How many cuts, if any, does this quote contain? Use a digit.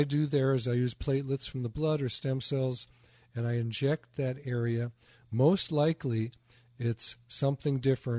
0